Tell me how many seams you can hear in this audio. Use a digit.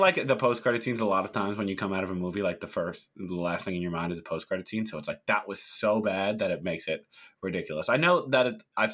0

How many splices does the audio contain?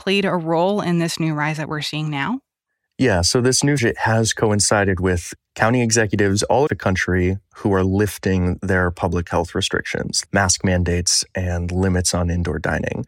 4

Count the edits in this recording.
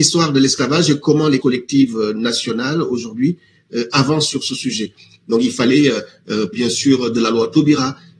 2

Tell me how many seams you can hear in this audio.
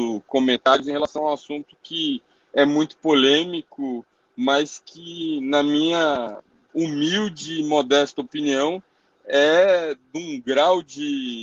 0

